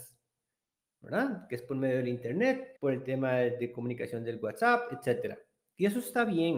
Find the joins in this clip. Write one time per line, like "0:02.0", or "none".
0:02.8